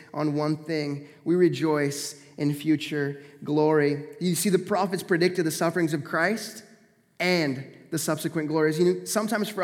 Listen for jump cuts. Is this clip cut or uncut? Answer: uncut